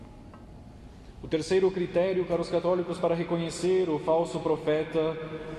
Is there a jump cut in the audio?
no; 0 cuts

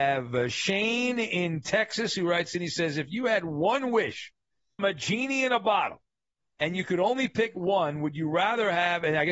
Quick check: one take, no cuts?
no; 1 cut; at 4.8 s

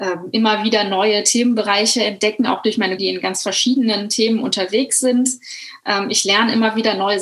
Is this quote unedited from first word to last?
no; 1 cut; at 3.0 s

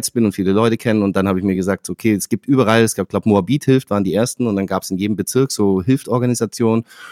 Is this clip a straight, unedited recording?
yes; 0 cuts

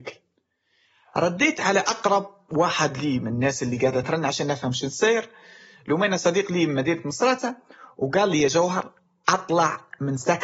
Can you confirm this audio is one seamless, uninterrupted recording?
yes; 0 cuts

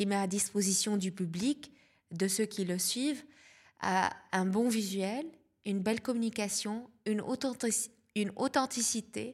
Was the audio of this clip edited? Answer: no; 0 cuts

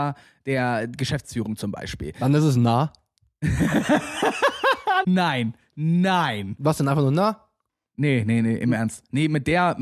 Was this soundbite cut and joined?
yes; 1 cut; at 5.0 s

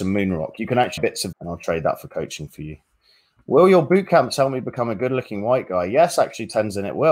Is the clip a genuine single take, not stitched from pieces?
no; 2 cuts; at 1.0 s, 1.3 s

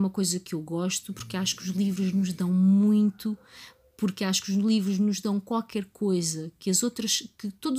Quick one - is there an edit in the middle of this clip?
no; 0 cuts

